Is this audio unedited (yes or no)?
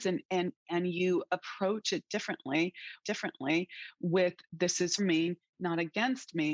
no